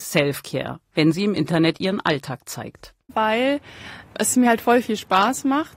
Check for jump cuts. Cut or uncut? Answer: uncut